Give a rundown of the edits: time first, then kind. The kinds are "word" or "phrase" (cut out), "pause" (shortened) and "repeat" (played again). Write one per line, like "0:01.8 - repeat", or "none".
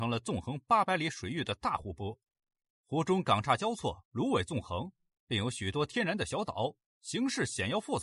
none